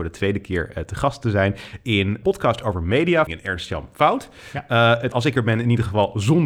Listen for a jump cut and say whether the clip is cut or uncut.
cut